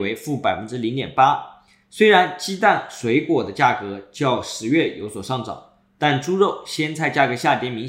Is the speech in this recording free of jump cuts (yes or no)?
yes